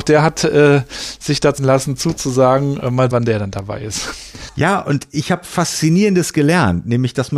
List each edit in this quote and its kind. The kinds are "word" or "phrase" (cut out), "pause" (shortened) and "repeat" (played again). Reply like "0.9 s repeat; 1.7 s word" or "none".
1.6 s word; 3.1 s word